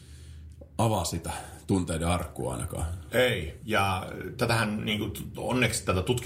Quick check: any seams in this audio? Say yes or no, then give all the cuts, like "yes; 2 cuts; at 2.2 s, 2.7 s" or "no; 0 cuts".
no; 0 cuts